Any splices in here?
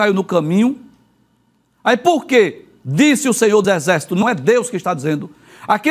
yes; 2 cuts; at 3.6 s, 4.2 s

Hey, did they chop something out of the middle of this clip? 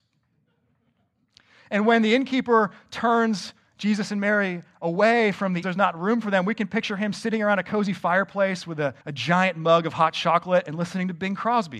yes; 2 cuts; at 5.6 s, 9.0 s

